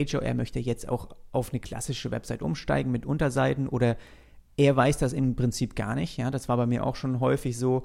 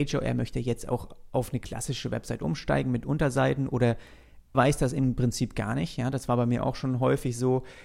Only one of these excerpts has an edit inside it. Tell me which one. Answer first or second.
second